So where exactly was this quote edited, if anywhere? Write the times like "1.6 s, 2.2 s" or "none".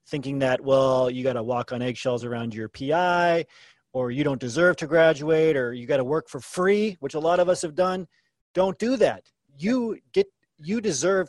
none